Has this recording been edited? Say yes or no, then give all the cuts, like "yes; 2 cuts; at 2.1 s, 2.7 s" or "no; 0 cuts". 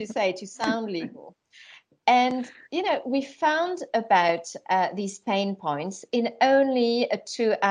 no; 0 cuts